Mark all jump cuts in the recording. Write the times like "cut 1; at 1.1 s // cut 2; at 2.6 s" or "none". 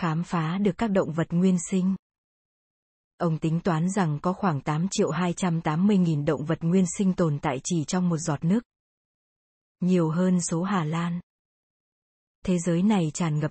cut 1; at 10.4 s